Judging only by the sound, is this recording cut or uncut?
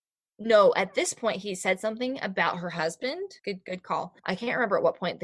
cut